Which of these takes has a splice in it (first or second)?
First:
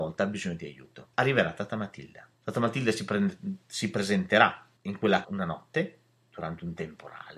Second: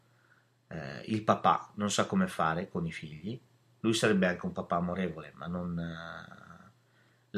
first